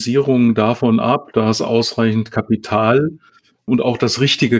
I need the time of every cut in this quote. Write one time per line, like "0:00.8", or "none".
none